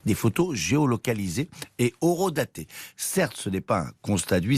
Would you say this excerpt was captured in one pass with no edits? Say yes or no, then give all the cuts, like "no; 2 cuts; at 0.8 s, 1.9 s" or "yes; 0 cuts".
yes; 0 cuts